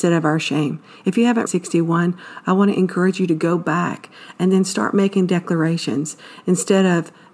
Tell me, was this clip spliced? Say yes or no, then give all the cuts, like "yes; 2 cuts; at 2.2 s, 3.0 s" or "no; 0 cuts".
yes; 1 cut; at 1.5 s